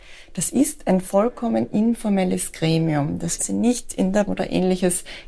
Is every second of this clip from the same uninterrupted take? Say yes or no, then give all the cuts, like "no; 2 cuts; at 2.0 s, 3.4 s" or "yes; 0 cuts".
no; 2 cuts; at 3.4 s, 4.3 s